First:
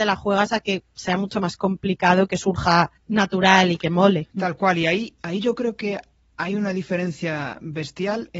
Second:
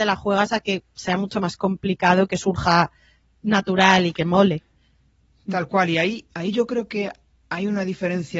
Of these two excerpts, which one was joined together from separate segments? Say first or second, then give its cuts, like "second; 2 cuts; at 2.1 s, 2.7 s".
first; 2 cuts; at 3.0 s, 4.3 s